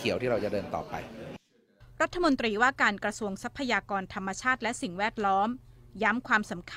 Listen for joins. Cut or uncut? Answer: uncut